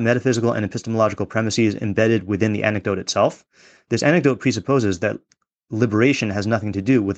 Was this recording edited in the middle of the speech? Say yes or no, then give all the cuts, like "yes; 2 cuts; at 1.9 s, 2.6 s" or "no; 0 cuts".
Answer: no; 0 cuts